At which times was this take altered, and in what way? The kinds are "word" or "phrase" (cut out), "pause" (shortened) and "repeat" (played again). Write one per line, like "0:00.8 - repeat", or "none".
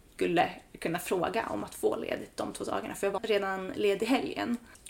0:03.2 - word